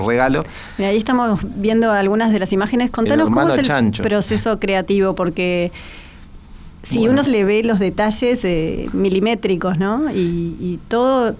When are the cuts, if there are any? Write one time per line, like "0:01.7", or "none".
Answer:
0:07.3